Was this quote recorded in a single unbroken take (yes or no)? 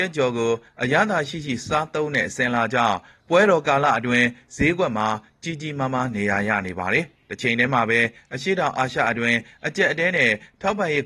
yes